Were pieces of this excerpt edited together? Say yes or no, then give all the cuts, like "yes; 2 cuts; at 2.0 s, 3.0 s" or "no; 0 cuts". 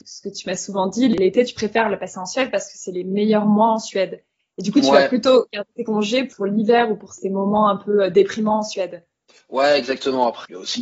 no; 0 cuts